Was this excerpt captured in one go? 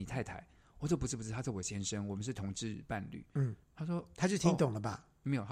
no; 1 cut; at 3.6 s

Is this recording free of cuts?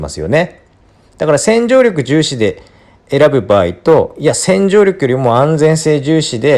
yes; 0 cuts

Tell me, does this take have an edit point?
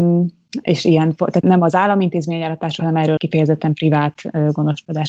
yes; 3 cuts; at 1.4 s, 2.8 s, 3.2 s

